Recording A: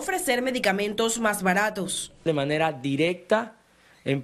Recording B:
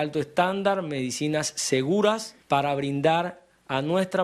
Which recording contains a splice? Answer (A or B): B